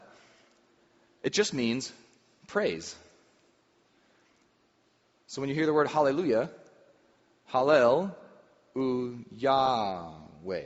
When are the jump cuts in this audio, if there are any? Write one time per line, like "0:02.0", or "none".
none

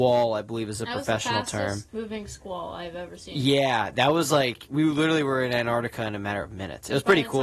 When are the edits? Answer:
0:01.9

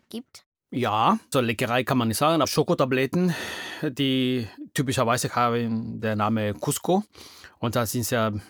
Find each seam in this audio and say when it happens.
0:01.3
0:02.4
0:05.3

